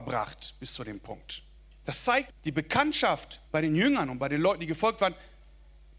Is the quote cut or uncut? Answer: cut